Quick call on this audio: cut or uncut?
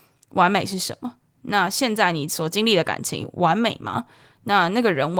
uncut